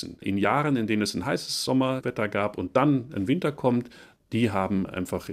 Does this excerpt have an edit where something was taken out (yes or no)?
no